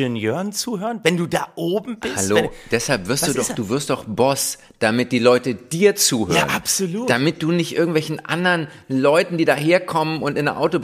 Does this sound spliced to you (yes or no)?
no